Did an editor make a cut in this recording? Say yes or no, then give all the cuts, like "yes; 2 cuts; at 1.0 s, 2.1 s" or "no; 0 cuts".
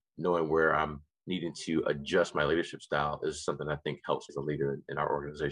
yes; 1 cut; at 4.3 s